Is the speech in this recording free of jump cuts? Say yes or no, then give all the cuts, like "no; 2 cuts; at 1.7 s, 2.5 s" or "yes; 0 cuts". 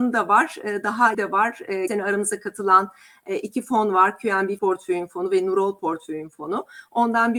no; 3 cuts; at 1.1 s, 1.9 s, 4.6 s